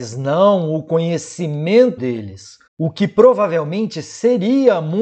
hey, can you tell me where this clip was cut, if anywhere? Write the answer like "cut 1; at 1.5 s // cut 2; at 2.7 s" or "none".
cut 1; at 2.0 s // cut 2; at 2.7 s